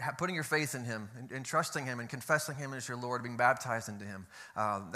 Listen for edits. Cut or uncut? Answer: uncut